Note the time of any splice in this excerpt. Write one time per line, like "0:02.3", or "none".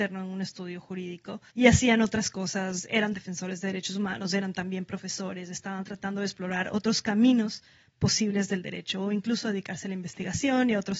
0:01.5

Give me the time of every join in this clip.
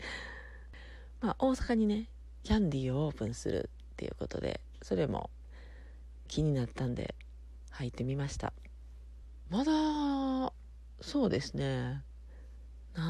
0:09.4

